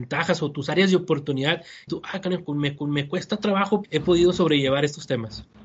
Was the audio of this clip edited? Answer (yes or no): yes